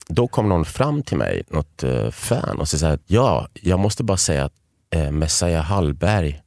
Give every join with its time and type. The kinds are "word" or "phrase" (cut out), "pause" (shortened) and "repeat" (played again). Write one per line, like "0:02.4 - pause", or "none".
0:01.4 - word
0:03.0 - pause